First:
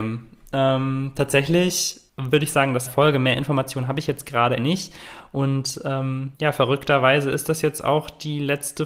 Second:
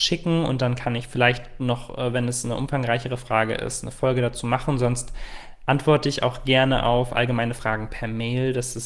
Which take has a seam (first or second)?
first